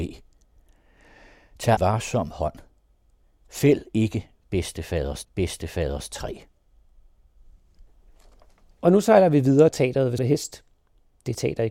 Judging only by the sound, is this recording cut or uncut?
cut